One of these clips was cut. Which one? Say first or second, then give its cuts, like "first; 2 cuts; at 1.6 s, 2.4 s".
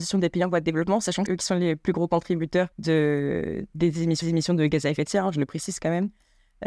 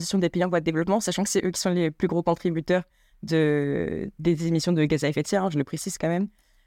first; 3 cuts; at 1.3 s, 2.7 s, 4.2 s